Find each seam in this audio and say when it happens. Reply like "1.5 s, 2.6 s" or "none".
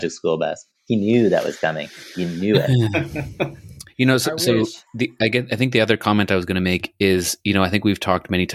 4.9 s